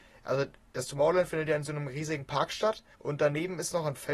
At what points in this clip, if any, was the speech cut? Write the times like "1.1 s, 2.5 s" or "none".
2.9 s